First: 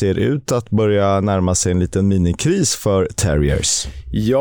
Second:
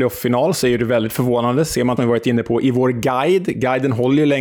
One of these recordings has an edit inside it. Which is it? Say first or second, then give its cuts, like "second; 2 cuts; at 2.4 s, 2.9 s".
second; 1 cut; at 2.0 s